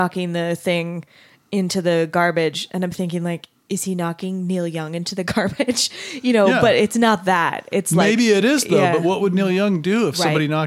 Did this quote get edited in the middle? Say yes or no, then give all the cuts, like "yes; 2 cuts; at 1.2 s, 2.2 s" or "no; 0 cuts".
no; 0 cuts